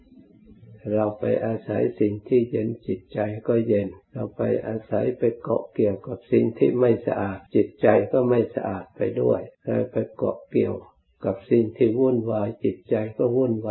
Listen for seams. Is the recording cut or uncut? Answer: cut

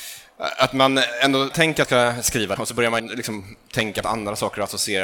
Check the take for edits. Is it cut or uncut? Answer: cut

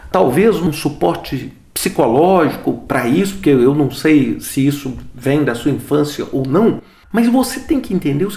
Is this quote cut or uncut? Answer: uncut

